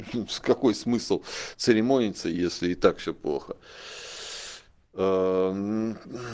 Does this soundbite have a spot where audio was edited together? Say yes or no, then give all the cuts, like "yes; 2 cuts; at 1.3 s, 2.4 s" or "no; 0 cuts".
no; 0 cuts